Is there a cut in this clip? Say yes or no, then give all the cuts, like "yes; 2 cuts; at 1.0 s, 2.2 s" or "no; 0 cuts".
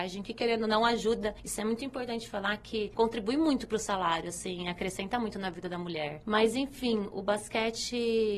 no; 0 cuts